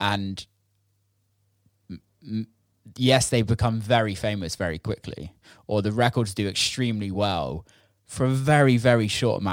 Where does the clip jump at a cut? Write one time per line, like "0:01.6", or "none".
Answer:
none